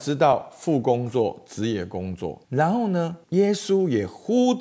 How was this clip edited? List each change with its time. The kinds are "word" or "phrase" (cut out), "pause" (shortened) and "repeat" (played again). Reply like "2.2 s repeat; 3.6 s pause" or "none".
2.4 s pause; 3.2 s pause